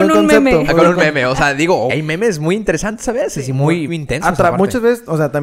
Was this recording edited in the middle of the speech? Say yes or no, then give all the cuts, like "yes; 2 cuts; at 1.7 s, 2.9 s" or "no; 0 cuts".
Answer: yes; 2 cuts; at 1.9 s, 3.9 s